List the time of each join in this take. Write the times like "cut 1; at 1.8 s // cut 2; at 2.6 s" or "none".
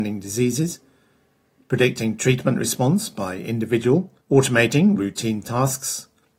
cut 1; at 4.2 s